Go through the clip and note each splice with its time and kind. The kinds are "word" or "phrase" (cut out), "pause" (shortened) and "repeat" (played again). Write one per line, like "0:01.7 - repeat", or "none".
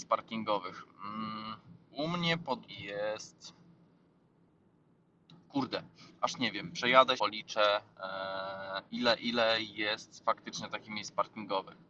0:01.8 - pause
0:02.7 - word
0:07.2 - word
0:08.9 - pause